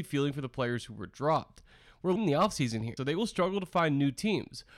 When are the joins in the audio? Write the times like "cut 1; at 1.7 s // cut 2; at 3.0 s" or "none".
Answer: cut 1; at 2.2 s // cut 2; at 3.0 s